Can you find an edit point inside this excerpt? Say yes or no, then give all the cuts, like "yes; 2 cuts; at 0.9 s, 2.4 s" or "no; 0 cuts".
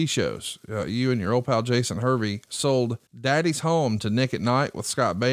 yes; 1 cut; at 3.1 s